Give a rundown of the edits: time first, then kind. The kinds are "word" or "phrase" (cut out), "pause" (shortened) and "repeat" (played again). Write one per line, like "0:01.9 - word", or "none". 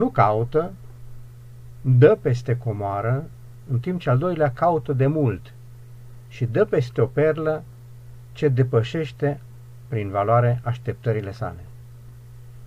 none